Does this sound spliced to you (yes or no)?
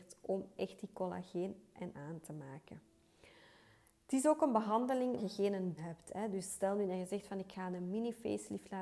yes